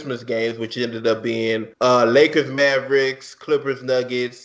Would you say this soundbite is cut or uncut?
cut